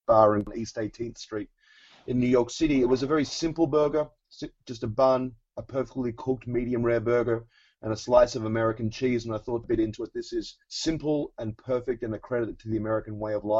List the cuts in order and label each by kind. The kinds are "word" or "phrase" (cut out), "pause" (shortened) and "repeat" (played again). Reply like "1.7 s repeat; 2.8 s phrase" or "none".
9.6 s phrase; 10.6 s pause